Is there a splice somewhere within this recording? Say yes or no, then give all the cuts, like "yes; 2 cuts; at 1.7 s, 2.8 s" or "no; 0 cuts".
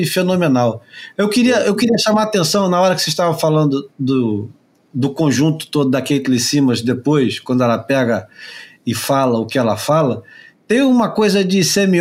yes; 1 cut; at 4.9 s